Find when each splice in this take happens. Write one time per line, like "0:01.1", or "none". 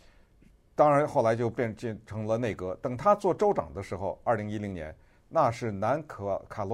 none